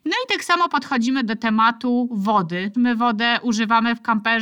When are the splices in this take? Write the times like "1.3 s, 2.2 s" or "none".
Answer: 2.7 s